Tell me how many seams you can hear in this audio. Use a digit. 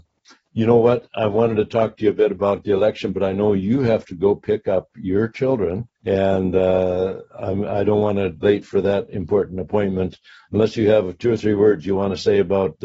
2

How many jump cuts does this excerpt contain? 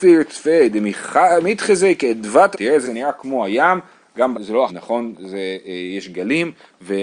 4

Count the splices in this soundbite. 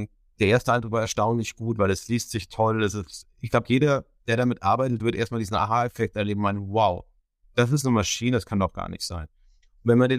1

